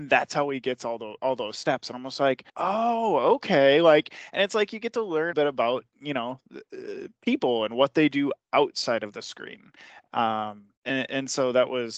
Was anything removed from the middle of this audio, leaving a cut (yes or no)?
yes